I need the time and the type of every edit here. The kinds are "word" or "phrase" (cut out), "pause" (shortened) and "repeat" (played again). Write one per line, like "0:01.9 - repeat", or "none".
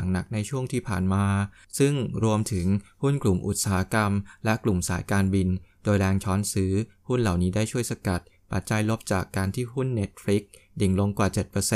none